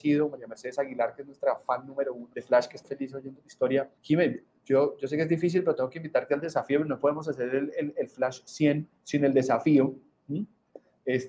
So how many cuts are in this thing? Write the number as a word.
four